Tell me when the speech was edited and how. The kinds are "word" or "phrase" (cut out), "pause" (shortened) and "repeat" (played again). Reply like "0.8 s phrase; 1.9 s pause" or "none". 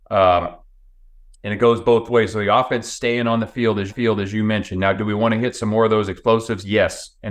3.9 s repeat